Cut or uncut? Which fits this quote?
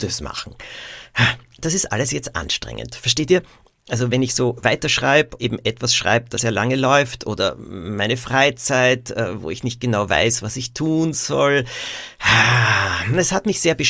cut